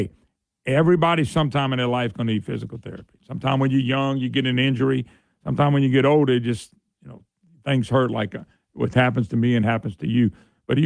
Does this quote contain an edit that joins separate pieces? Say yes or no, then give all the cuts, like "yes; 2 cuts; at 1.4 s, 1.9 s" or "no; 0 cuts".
no; 0 cuts